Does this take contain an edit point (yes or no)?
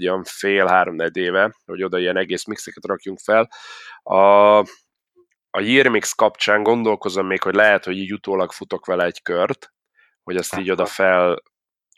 no